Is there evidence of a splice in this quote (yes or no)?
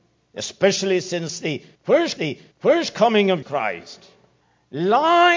yes